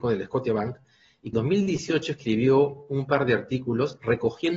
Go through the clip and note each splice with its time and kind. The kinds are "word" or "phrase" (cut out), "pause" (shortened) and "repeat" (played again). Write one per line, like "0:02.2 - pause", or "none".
0:01.3 - word